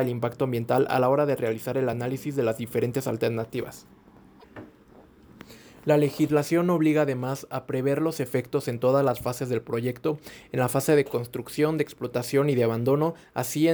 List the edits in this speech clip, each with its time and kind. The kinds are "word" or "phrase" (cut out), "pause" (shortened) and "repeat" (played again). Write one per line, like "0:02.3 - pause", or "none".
none